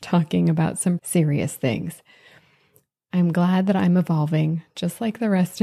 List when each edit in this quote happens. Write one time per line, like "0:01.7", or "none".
0:01.0